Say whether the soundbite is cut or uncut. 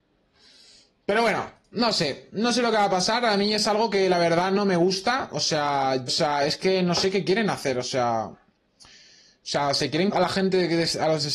cut